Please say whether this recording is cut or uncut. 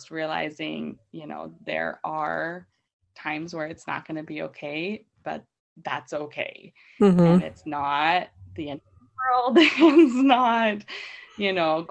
uncut